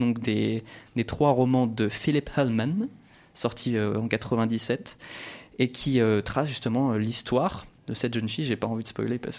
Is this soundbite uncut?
no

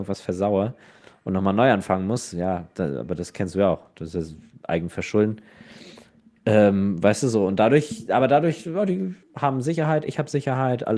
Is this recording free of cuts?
no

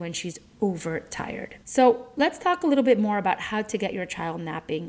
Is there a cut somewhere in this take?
yes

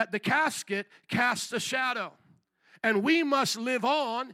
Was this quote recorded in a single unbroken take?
yes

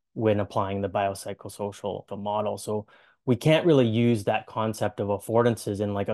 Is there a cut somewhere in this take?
no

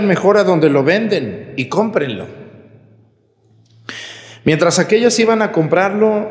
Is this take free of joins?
yes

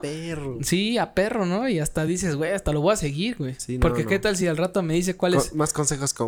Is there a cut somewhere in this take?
no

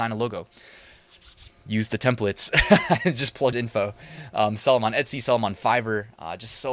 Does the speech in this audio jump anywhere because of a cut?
yes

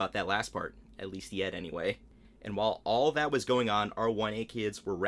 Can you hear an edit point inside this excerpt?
no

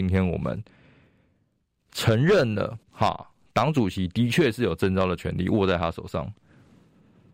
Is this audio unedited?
no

